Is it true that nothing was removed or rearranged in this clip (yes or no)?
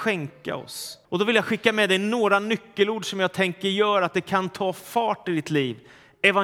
no